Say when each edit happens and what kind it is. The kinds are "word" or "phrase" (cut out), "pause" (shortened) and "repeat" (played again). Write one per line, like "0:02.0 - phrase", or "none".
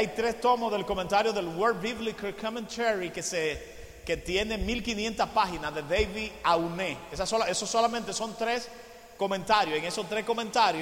none